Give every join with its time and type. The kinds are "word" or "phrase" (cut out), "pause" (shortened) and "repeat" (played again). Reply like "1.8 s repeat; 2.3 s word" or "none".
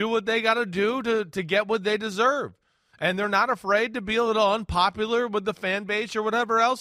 none